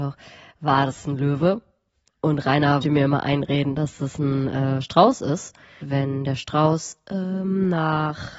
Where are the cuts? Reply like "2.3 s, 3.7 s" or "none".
2.8 s, 5.8 s